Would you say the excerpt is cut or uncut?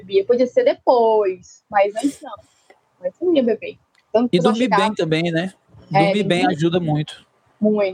uncut